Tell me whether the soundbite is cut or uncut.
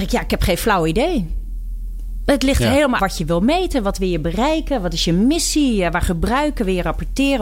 cut